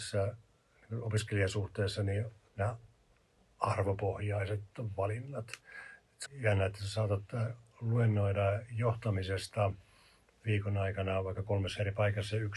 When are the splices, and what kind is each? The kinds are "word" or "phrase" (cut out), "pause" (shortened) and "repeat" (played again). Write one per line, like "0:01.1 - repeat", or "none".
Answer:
0:02.5 - word
0:06.3 - word